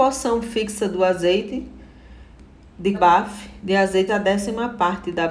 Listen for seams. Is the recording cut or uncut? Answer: cut